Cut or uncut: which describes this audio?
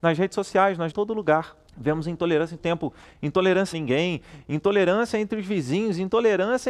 cut